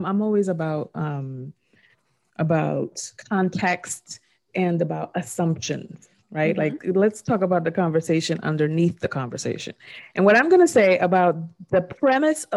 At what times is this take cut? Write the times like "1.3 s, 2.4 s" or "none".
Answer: 6.8 s

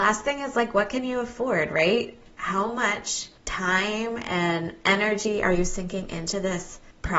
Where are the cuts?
3.4 s

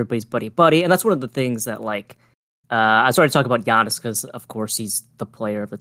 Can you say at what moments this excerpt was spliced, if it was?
none

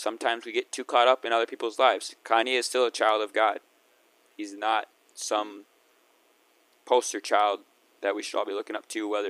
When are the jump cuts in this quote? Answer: 5.1 s

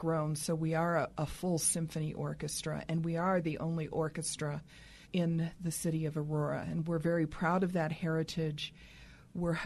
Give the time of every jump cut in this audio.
5.0 s

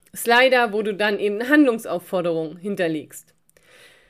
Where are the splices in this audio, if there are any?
none

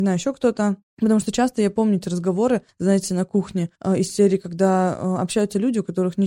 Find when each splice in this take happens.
none

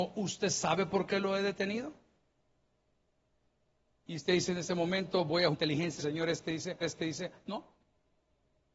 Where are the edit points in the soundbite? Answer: 5.5 s, 6.0 s, 6.8 s

